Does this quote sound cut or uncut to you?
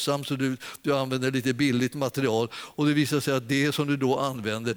uncut